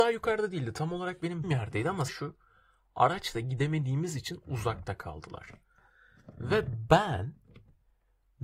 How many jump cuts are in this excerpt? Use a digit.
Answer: 2